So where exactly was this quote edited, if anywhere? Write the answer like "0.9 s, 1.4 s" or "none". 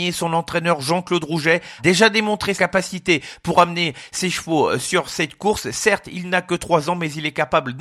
1.8 s, 2.6 s

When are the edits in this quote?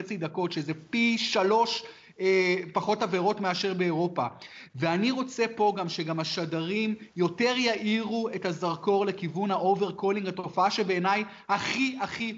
none

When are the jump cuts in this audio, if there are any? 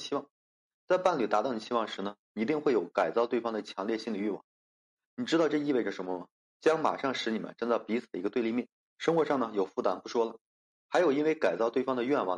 6.4 s, 8.8 s

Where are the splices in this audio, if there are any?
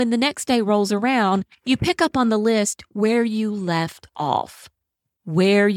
none

